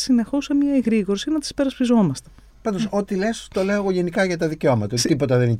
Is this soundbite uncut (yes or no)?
yes